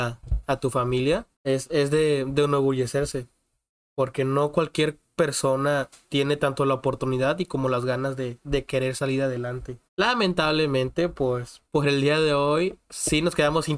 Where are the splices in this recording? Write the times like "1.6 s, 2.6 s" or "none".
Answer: 1.3 s, 9.9 s, 11.7 s